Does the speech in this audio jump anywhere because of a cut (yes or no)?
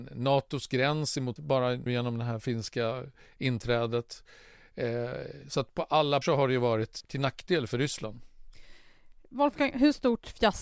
yes